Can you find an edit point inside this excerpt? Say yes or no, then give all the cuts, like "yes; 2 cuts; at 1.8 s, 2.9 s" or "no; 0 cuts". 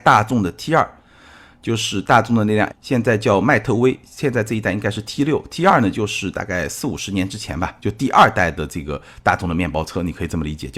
yes; 1 cut; at 2.7 s